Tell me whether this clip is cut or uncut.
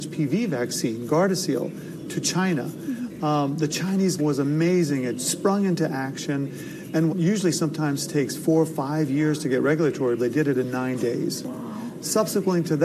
cut